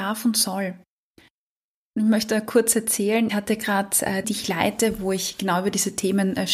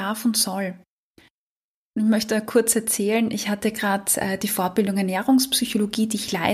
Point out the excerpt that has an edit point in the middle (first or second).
first